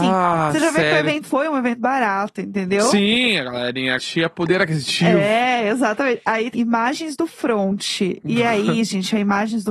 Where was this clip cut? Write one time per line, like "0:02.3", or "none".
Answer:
0:01.2
0:04.0
0:06.5